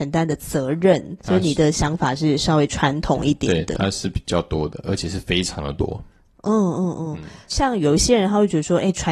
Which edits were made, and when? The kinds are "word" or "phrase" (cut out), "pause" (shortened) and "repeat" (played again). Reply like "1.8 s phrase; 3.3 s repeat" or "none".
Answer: 1.2 s word